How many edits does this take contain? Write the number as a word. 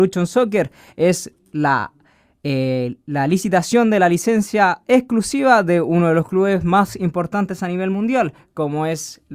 zero